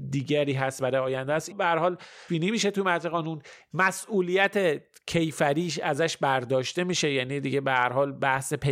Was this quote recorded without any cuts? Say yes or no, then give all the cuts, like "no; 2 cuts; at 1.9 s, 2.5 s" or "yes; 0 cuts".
no; 2 cuts; at 1.5 s, 2.3 s